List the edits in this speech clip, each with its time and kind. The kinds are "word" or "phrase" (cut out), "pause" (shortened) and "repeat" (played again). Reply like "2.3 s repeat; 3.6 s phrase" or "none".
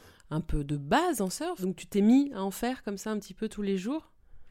none